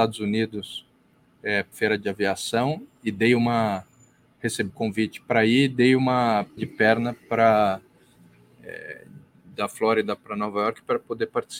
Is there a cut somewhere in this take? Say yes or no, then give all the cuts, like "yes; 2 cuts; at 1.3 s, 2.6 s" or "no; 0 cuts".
yes; 3 cuts; at 1.7 s, 4.7 s, 6.6 s